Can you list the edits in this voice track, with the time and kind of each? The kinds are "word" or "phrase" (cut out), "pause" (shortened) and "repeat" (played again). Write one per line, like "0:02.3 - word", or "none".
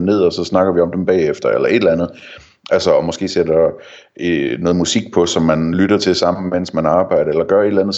none